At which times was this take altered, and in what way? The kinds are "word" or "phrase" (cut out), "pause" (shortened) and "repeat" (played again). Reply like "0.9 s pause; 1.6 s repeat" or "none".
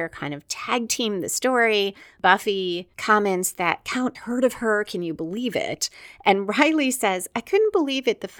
4.1 s word